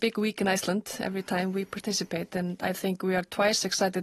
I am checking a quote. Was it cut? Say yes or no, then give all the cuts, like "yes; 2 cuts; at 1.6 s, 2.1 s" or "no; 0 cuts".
no; 0 cuts